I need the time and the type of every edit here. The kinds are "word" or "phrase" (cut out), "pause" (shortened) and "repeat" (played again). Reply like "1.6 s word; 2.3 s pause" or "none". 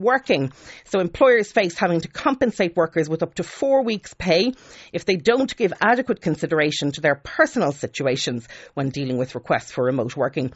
none